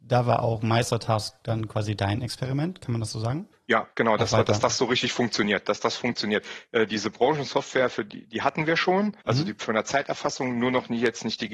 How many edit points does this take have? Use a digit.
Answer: 2